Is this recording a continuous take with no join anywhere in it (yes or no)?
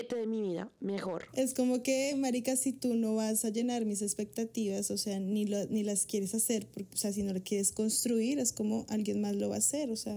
yes